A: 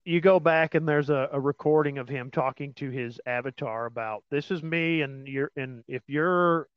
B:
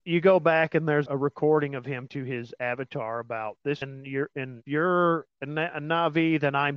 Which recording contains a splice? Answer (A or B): B